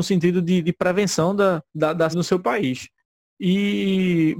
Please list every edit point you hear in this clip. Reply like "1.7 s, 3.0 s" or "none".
1.7 s, 2.1 s